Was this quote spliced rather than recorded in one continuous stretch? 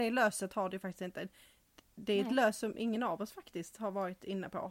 no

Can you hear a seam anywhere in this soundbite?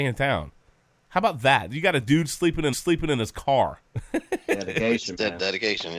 yes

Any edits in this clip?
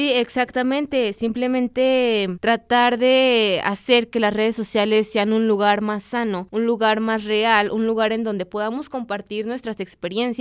no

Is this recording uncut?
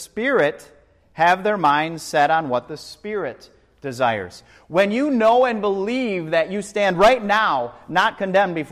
yes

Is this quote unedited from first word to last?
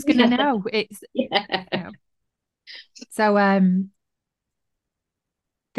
no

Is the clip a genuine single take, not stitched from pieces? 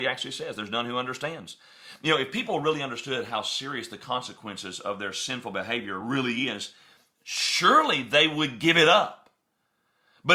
yes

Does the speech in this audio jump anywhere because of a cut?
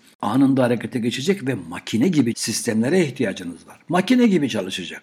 yes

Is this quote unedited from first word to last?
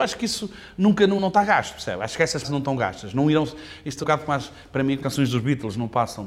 no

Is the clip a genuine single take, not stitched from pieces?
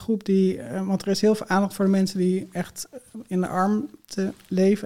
yes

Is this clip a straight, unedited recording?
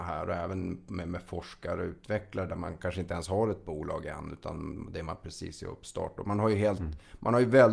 yes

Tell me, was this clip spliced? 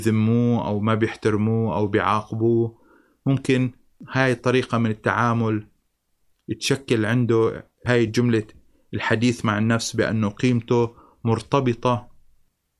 no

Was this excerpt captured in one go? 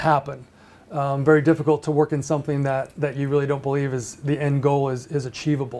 yes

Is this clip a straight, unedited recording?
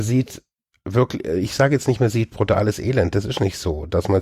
yes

